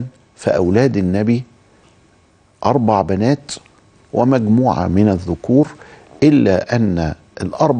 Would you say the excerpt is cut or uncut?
uncut